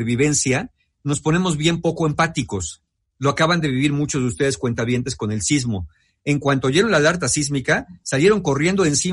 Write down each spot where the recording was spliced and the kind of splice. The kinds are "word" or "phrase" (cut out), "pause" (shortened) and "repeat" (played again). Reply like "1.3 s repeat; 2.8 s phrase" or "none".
none